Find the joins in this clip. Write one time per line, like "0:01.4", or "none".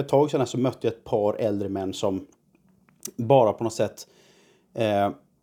none